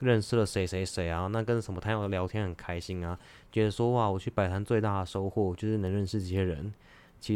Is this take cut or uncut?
uncut